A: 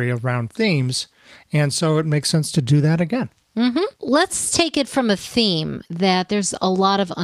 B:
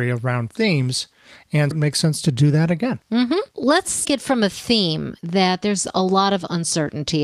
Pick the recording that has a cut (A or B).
B